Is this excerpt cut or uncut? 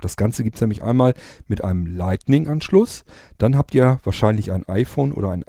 uncut